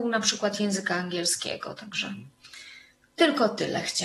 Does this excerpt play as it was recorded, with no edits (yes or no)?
yes